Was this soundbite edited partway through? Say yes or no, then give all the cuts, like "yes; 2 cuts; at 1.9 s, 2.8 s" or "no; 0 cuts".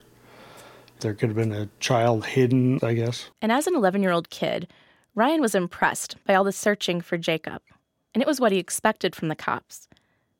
yes; 1 cut; at 3.3 s